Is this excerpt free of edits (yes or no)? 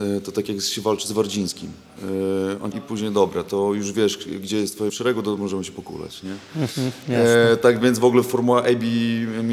no